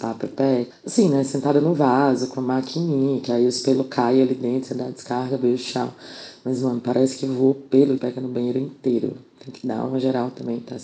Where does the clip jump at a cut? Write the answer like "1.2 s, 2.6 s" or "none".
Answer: 8.0 s